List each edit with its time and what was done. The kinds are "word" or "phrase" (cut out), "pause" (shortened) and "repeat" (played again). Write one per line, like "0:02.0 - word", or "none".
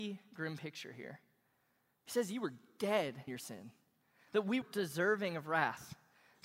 0:03.3 - word
0:04.6 - word